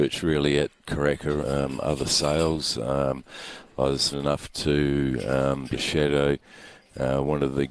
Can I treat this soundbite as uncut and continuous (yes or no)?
no